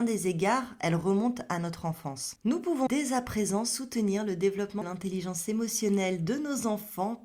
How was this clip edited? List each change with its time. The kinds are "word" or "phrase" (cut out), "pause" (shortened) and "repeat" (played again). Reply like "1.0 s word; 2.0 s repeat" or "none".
2.9 s word; 4.8 s word